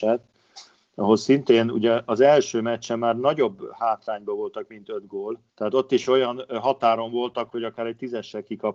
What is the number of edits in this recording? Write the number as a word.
one